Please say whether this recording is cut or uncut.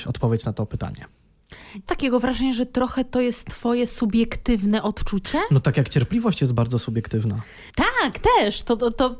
cut